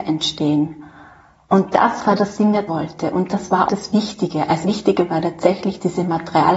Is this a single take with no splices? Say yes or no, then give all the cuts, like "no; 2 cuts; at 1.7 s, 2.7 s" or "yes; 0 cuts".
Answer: no; 4 cuts; at 2.2 s, 2.7 s, 3.7 s, 4.6 s